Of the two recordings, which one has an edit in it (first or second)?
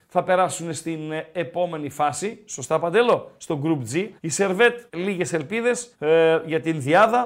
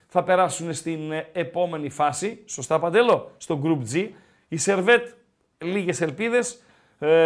first